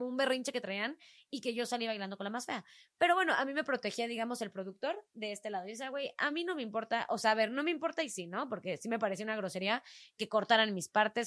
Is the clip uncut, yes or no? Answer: yes